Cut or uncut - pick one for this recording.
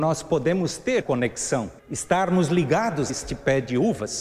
cut